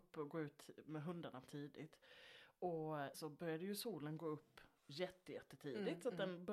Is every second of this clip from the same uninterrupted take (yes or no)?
no